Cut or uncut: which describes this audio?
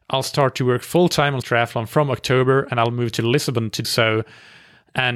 cut